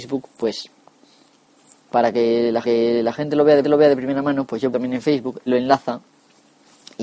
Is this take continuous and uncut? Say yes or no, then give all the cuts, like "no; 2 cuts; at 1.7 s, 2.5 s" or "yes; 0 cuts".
no; 5 cuts; at 1.8 s, 2.6 s, 3.6 s, 4.7 s, 5.5 s